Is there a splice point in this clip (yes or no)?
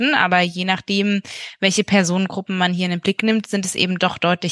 no